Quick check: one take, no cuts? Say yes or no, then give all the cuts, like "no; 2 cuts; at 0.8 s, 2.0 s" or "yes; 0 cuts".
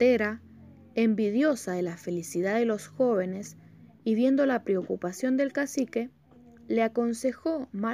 yes; 0 cuts